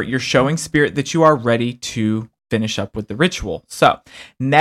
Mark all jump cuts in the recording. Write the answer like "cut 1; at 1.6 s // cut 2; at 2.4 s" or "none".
cut 1; at 2.4 s